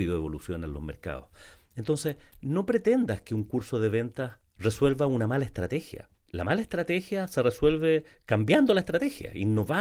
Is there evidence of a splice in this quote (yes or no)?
yes